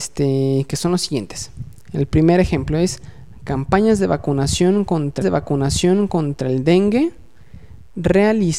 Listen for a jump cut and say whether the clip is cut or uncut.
cut